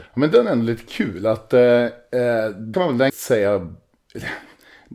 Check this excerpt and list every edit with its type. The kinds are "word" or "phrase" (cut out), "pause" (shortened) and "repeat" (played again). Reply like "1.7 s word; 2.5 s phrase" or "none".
2.7 s word; 3.1 s word